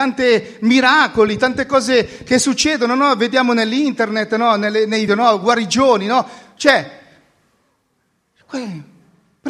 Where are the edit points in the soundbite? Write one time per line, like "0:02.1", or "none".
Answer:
0:05.1